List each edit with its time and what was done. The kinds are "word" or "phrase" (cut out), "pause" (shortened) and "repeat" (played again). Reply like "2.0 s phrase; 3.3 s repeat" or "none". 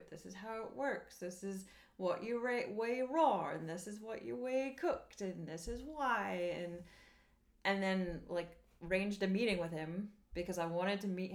none

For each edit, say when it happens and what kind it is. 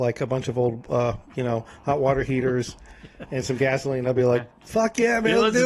none

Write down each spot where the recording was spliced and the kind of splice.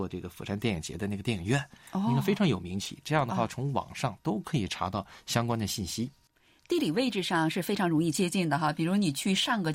none

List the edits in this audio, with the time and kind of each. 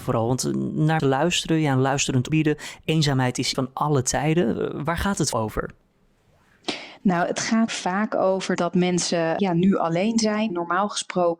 1.0 s word; 2.3 s word; 3.5 s word; 5.3 s word; 7.7 s word; 8.6 s word; 9.4 s word; 10.5 s word

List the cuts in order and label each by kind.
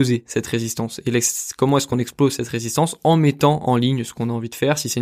none

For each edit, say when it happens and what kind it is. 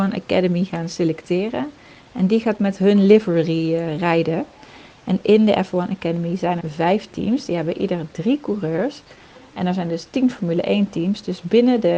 6.6 s word

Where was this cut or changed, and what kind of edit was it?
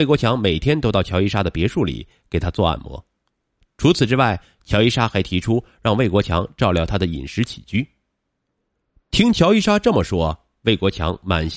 none

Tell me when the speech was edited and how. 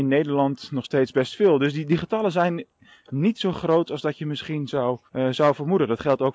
5.1 s pause

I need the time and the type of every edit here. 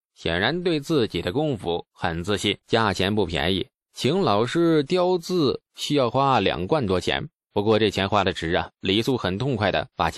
2.6 s pause

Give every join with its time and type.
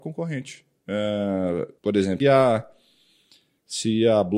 1.8 s pause; 2.2 s word

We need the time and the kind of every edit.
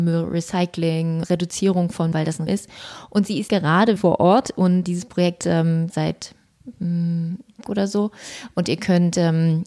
1.2 s word; 2.1 s word; 2.5 s word; 3.5 s word; 4.0 s word; 4.8 s word; 5.4 s word; 5.9 s word; 7.6 s word

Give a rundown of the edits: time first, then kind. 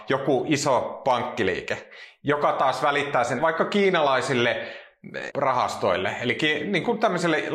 3.4 s word; 5.3 s word

